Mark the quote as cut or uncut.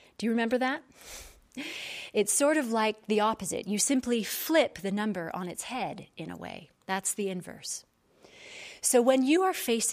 cut